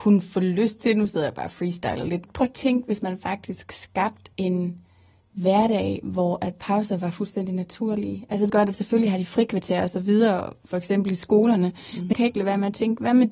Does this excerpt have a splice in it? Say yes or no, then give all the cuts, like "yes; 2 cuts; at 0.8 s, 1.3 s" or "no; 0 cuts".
yes; 4 cuts; at 2.3 s, 4.3 s, 8.5 s, 12.1 s